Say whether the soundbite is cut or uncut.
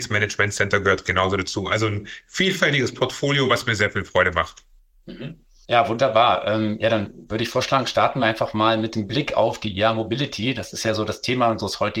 uncut